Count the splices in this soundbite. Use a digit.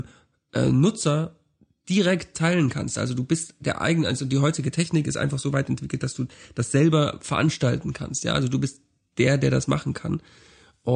0